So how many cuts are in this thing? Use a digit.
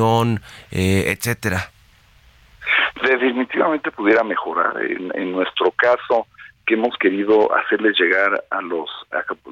0